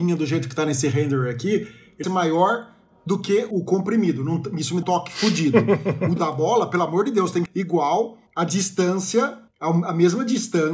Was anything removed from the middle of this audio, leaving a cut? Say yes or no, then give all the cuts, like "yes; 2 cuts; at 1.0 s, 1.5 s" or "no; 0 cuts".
yes; 7 cuts; at 2.0 s, 3.5 s, 4.8 s, 6.2 s, 7.5 s, 8.3 s, 9.5 s